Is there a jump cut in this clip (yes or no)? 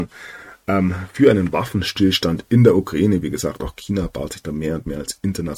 no